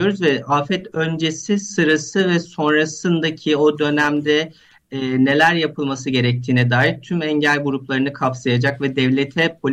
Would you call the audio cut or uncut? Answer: uncut